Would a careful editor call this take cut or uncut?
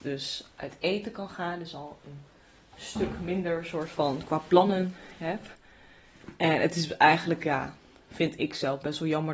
uncut